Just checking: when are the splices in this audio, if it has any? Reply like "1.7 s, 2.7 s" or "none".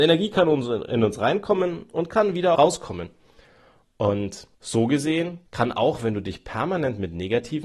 2.5 s, 4.5 s, 5.5 s